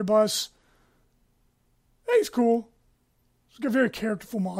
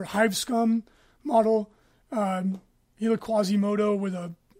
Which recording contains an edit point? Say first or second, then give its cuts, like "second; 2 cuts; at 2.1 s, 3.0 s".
second; 1 cut; at 3.2 s